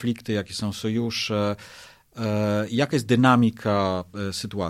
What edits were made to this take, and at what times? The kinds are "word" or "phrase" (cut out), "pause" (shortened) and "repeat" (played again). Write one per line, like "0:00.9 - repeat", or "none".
none

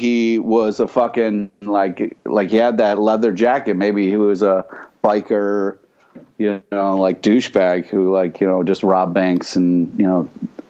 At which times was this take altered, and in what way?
none

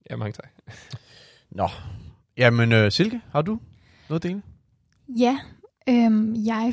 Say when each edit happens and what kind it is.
none

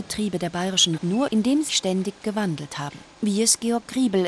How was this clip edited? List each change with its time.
0:01.0 - word
0:01.3 - word
0:01.7 - word
0:03.1 - pause

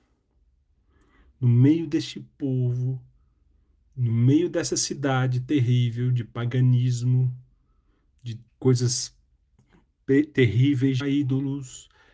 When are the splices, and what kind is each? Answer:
0:08.5 - pause
0:11.0 - word

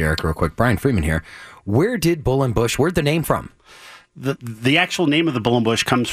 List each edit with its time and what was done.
0:03.2 - word
0:04.4 - word

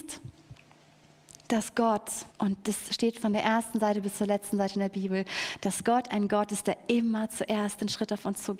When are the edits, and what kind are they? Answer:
0:02.3 - pause

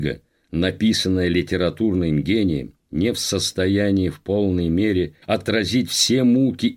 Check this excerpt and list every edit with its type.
0:05.2 - pause

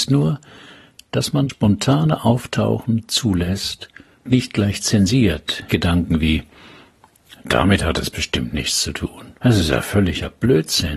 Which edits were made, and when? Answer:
0:01.5 - word
0:04.3 - word
0:05.7 - word
0:09.4 - pause

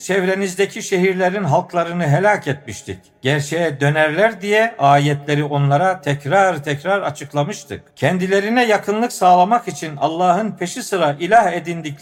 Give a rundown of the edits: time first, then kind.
0:07.9 - pause

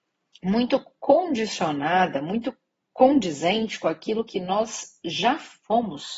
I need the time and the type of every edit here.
none

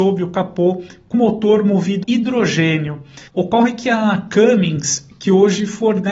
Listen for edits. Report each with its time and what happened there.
0:01.1 - word
0:02.0 - word
0:03.3 - pause

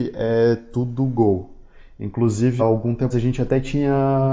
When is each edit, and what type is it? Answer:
0:02.6 - word
0:03.1 - word

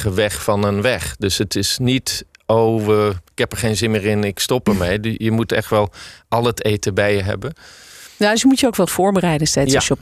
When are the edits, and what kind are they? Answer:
0:03.3 - pause
0:08.9 - word

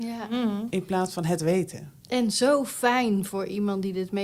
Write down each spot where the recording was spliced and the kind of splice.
0:02.0 - pause

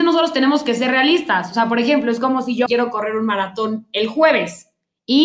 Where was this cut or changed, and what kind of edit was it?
0:02.7 - phrase

